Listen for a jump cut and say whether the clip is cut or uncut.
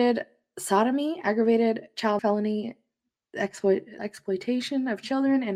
cut